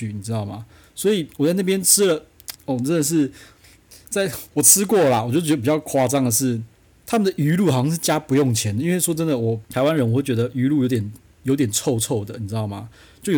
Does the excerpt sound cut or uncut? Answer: cut